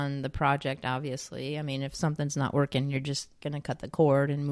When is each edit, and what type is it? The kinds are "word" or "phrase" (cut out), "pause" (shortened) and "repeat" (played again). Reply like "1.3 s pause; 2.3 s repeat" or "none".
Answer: none